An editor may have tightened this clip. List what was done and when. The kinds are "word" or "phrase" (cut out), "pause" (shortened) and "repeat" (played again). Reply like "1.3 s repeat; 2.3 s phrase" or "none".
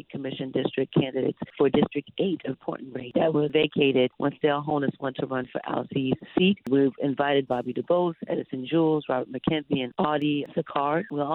2.5 s word; 3.1 s phrase